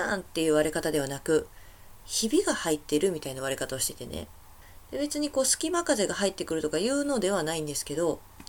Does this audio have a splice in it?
yes; 1 cut; at 2.0 s

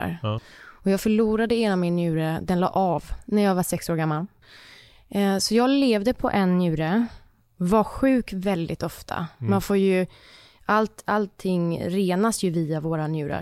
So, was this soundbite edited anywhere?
no; 0 cuts

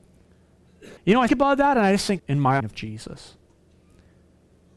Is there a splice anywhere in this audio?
yes; 4 cuts; at 1.0 s, 1.3 s, 2.2 s, 2.6 s

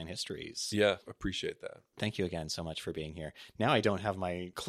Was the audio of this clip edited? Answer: no; 0 cuts

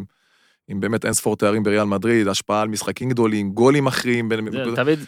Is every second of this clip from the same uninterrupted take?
yes; 0 cuts

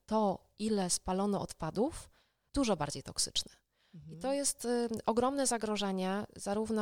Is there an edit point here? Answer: yes; 1 cut; at 2.5 s

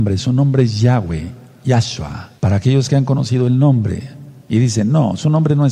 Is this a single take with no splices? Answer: no; 1 cut; at 2.4 s

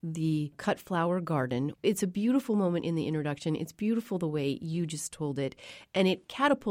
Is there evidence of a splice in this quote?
no; 0 cuts

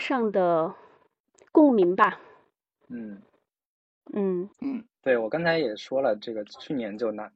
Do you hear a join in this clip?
yes; 1 cut; at 4.5 s

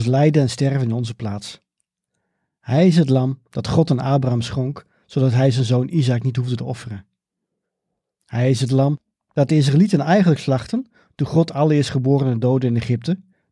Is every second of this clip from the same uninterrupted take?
yes; 0 cuts

